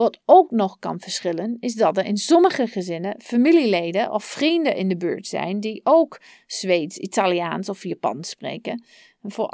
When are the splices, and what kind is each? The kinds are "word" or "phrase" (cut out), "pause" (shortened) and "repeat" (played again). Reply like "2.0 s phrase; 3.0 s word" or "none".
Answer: none